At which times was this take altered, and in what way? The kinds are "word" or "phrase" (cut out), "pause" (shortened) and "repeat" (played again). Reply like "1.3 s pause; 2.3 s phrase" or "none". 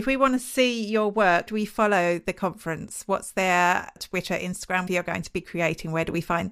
1.5 s word; 4.0 s word; 4.9 s word